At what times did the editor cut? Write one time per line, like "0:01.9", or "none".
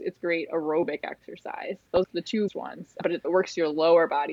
0:02.0
0:02.5
0:03.2